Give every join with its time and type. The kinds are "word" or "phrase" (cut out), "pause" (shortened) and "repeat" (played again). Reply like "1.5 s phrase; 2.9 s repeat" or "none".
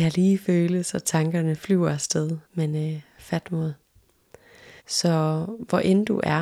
2.4 s pause; 4.8 s pause